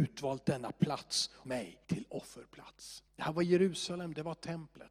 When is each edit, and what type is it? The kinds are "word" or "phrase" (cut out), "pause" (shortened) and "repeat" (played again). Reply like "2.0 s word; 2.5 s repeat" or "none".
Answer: 1.4 s word; 1.8 s pause; 3.1 s pause